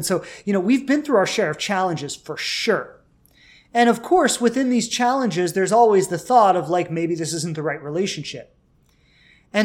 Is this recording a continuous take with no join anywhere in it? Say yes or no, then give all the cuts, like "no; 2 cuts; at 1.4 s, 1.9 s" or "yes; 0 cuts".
yes; 0 cuts